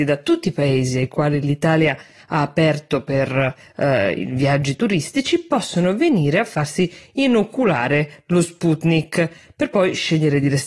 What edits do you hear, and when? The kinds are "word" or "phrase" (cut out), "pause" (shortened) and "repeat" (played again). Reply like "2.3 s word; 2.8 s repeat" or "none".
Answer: none